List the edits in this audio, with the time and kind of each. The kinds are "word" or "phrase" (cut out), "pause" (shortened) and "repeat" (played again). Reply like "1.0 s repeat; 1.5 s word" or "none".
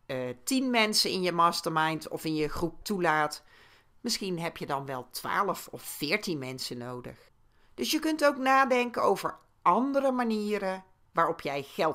2.8 s word; 7.3 s pause

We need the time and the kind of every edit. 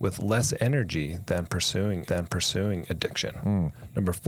2.1 s repeat

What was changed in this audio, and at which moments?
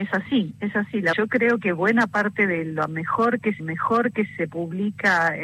1.1 s phrase; 3.6 s repeat

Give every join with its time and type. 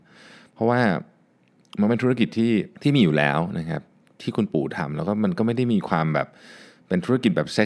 2.7 s pause

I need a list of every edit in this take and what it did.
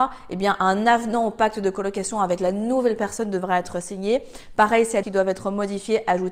5.0 s phrase

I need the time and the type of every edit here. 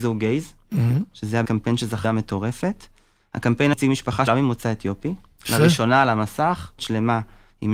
1.4 s word; 2.0 s word; 3.7 s word; 4.3 s word; 6.8 s word

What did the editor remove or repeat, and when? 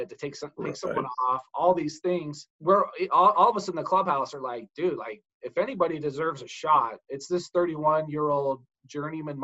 2.5 s pause

